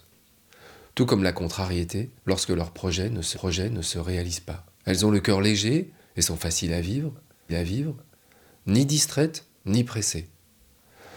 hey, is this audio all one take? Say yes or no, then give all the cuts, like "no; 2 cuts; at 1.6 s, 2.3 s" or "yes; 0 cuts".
no; 4 cuts; at 2.2 s, 3.3 s, 4.7 s, 7.5 s